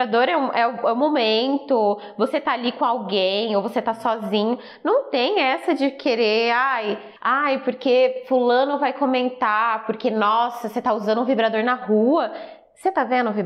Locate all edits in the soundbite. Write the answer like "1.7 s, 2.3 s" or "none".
7.2 s

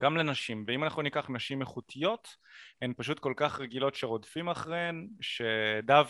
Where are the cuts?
none

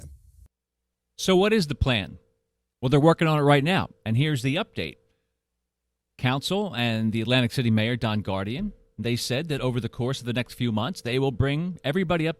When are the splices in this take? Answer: none

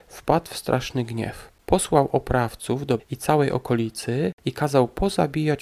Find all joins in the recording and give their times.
1.6 s, 3.0 s, 4.4 s

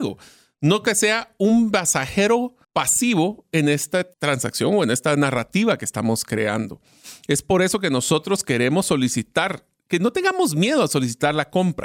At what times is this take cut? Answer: 2.6 s, 4.1 s

